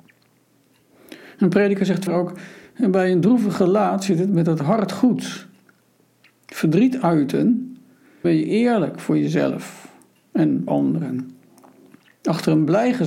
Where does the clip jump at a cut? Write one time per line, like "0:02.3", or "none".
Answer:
0:02.1
0:08.2
0:10.7